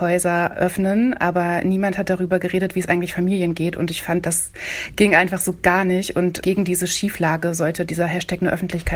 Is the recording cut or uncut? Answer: uncut